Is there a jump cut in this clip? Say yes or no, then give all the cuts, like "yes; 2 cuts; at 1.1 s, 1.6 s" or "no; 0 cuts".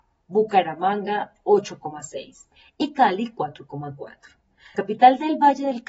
yes; 1 cut; at 4.7 s